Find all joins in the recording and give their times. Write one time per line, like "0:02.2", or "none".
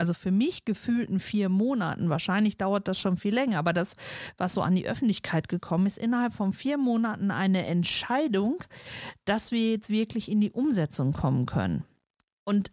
none